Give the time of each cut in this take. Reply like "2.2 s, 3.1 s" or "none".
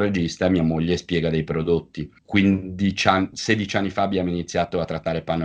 2.2 s